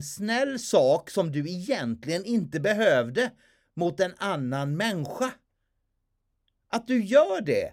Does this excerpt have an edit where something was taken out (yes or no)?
no